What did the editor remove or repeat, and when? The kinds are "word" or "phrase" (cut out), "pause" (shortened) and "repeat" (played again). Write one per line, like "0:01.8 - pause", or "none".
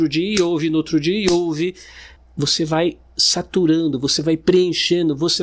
0:02.2 - pause